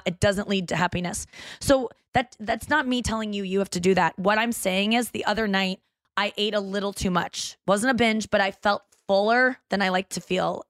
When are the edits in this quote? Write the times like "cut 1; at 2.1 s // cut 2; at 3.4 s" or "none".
none